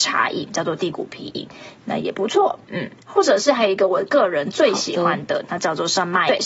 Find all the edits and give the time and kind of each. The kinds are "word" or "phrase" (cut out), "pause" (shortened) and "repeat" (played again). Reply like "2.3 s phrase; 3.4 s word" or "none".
2.6 s pause